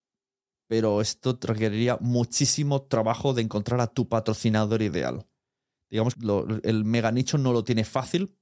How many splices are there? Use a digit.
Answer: 1